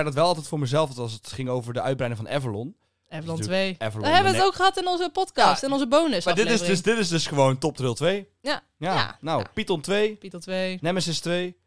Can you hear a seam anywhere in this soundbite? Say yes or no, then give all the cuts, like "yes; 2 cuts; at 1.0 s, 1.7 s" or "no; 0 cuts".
no; 0 cuts